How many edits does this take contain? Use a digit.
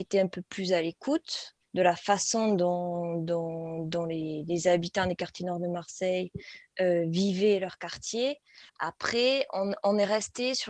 2